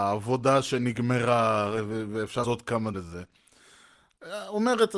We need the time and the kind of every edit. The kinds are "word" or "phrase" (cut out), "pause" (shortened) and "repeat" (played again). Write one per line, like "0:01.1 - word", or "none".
0:02.4 - word
0:02.9 - word